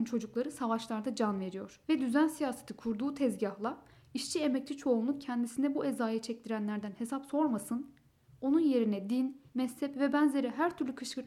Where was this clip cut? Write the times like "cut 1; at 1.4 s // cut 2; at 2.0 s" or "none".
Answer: cut 1; at 1.8 s // cut 2; at 9.5 s